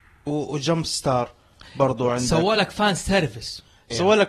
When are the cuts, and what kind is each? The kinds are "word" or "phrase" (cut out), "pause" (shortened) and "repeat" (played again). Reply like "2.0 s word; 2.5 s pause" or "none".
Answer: none